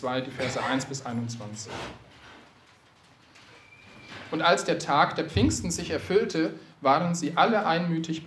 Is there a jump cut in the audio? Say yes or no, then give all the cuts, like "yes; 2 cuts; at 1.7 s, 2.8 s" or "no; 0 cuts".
no; 0 cuts